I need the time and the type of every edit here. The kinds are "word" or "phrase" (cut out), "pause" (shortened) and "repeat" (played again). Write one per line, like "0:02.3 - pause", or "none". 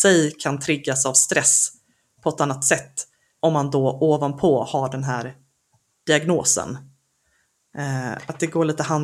none

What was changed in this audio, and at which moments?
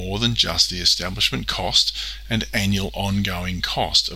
none

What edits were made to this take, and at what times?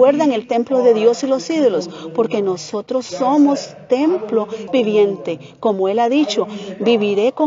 0:04.7 - phrase

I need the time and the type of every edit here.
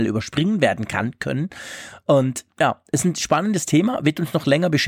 none

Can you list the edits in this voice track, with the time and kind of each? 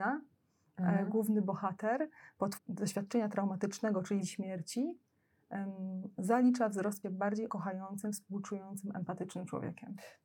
0:02.6 - word
0:04.2 - word
0:07.0 - phrase
0:07.5 - word

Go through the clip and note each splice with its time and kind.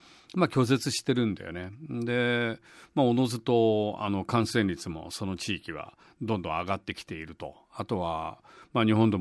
none

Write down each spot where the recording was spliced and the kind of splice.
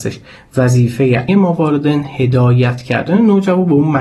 0:01.3 - word

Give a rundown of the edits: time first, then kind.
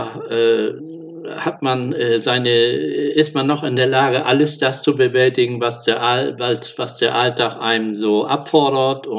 none

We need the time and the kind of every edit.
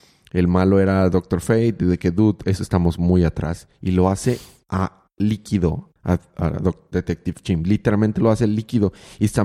0:06.0 - pause
0:06.9 - word

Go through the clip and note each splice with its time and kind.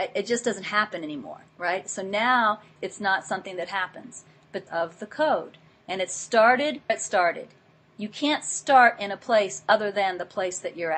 0:01.5 - pause
0:02.8 - word
0:04.7 - phrase
0:06.9 - word

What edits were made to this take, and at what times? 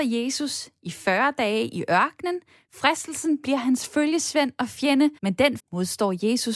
0:03.4 - word
0:05.2 - pause
0:05.6 - word

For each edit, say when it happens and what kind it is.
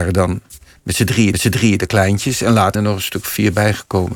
0:01.3 - repeat
0:02.7 - word

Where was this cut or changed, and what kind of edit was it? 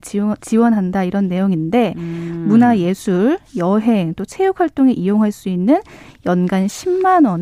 none

